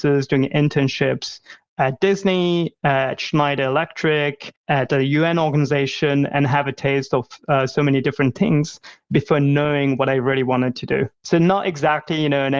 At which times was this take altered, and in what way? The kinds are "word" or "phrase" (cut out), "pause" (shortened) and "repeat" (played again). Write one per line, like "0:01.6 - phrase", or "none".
0:04.6 - pause
0:11.1 - pause